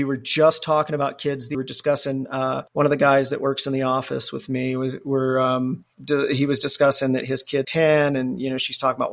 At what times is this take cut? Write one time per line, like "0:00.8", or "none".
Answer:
0:01.5
0:02.7
0:05.9
0:07.6